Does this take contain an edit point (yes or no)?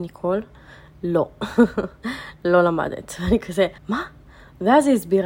yes